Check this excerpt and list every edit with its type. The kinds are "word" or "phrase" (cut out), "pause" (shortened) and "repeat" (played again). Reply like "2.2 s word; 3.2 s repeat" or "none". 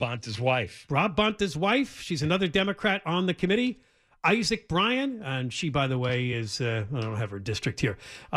none

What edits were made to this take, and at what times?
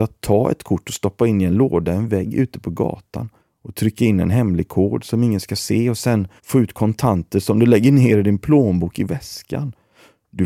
3.4 s pause; 6.4 s pause

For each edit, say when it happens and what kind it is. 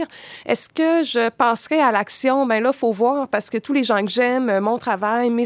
none

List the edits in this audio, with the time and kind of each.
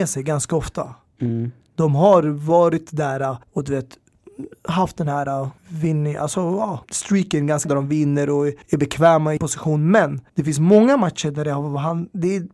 3.4 s pause; 5.6 s pause; 6.8 s pause; 7.6 s word; 8.6 s pause; 9.4 s phrase; 10.3 s pause

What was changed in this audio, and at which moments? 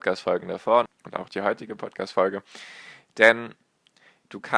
1.3 s word

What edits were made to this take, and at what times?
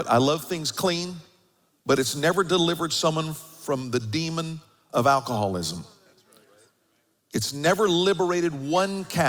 none

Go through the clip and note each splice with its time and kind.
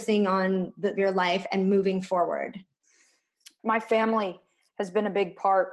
1.0 s phrase; 3.6 s word

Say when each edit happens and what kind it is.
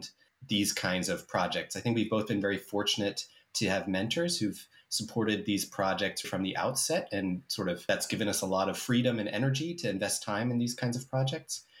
6.2 s word

